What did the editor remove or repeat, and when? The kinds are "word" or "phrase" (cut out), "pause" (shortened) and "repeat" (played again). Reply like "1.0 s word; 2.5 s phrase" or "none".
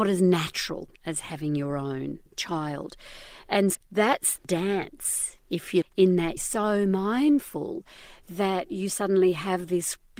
1.0 s pause; 3.7 s word; 4.4 s word; 5.8 s word; 6.4 s phrase